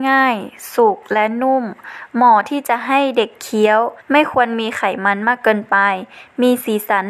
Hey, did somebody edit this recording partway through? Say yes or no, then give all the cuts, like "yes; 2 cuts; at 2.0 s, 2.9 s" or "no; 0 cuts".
yes; 1 cut; at 4.0 s